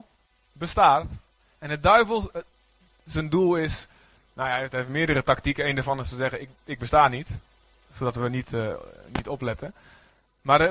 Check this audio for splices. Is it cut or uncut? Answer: uncut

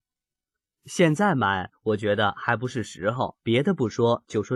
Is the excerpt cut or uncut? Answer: cut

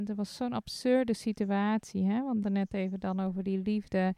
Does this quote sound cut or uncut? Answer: cut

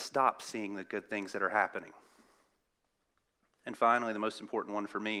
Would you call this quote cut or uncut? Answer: uncut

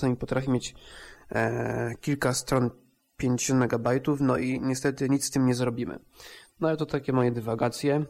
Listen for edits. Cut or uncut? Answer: uncut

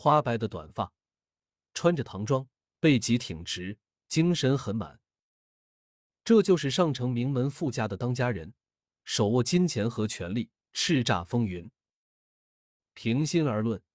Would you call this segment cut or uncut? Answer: uncut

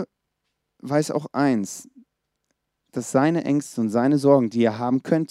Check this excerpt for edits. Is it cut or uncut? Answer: uncut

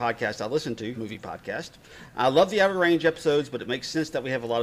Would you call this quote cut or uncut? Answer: cut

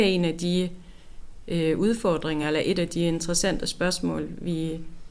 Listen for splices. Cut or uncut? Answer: uncut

